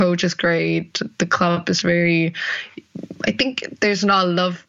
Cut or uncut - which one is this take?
cut